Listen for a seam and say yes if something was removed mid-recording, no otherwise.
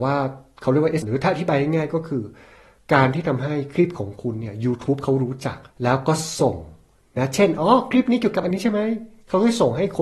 yes